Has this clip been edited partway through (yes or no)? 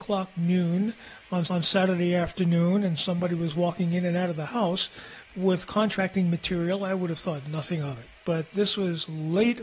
yes